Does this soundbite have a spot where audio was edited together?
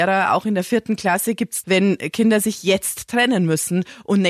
yes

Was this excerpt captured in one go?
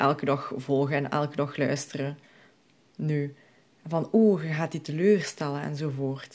yes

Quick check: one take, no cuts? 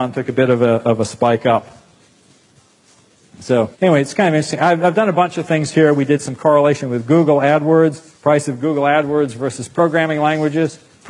no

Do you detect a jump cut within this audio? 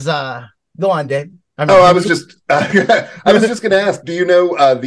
no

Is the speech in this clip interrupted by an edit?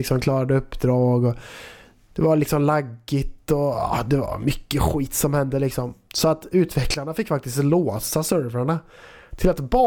no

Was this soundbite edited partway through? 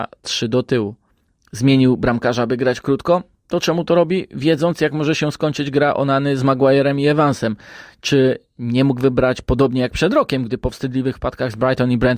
no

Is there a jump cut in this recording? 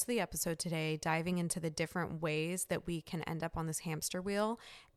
no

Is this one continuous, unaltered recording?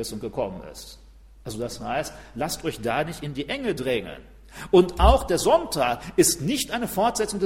yes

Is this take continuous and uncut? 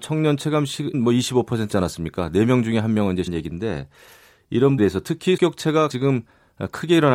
no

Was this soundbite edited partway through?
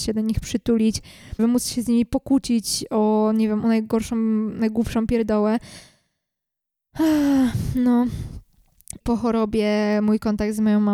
yes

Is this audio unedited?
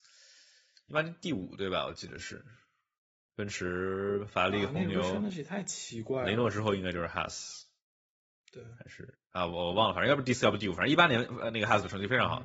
no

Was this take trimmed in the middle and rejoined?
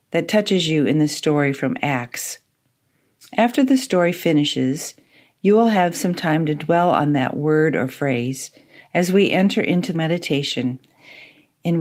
yes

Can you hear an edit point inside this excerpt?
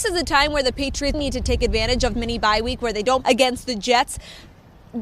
yes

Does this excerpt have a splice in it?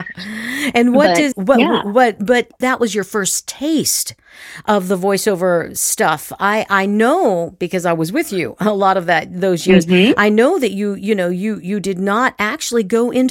yes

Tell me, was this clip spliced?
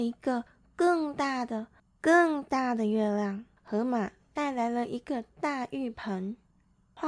yes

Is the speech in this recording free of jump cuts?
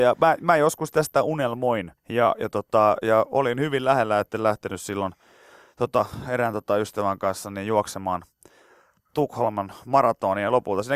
no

